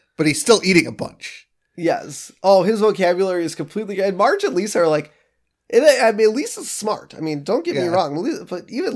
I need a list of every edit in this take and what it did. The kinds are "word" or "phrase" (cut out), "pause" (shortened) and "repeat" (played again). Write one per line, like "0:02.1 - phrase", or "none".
none

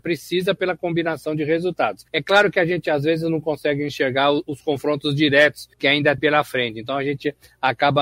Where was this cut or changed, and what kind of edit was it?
0:02.1 - pause
0:05.7 - pause
0:06.2 - word

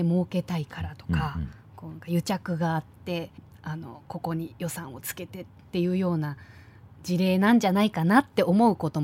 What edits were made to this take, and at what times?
0:03.4 - pause

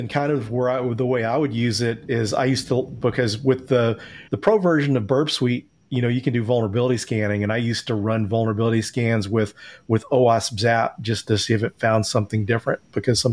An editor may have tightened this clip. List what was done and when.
0:04.3 - pause

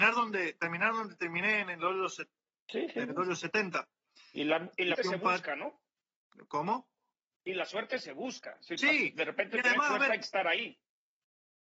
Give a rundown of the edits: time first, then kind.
0:04.9 - word

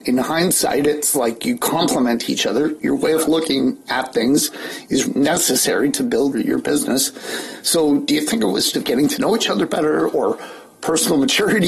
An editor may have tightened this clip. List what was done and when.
0:05.1 - word
0:06.3 - word
0:08.7 - phrase

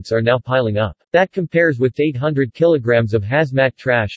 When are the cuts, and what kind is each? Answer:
0:01.0 - pause
0:01.9 - word

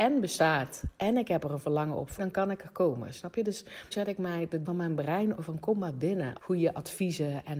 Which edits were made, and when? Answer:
0:02.2 - word
0:03.9 - word
0:04.7 - word
0:05.4 - word
0:06.4 - word

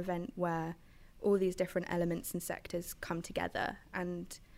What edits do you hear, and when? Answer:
none

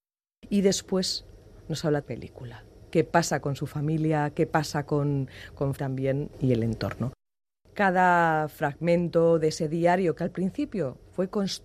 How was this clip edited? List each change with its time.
0:02.0 - phrase
0:02.9 - pause
0:05.8 - phrase

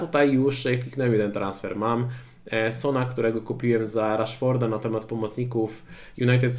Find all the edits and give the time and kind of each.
none

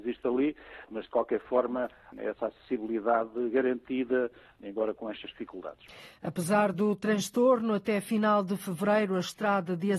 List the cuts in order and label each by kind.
none

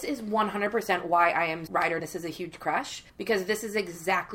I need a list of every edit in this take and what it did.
0:01.7 - word
0:02.0 - phrase
0:03.1 - pause

